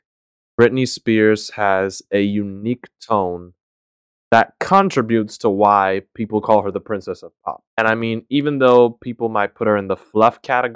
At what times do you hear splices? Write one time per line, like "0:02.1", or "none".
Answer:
0:07.7